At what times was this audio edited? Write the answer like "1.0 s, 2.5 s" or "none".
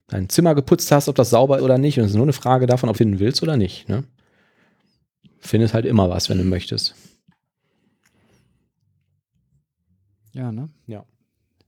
1.6 s, 2.1 s, 2.9 s

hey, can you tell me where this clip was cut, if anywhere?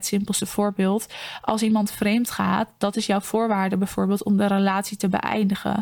none

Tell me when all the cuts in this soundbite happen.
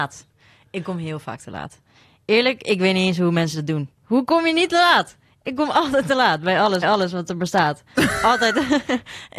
4.0 s, 6.8 s

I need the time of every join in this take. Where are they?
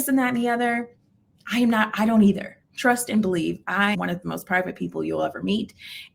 3.9 s

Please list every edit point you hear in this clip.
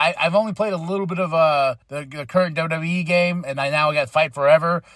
1.8 s

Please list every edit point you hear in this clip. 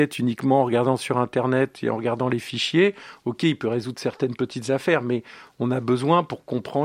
none

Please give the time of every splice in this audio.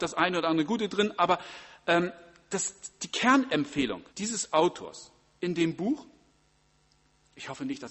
4.1 s

